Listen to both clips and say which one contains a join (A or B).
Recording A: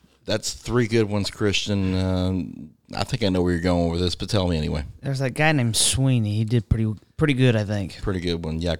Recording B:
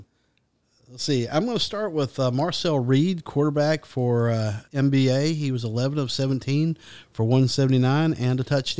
B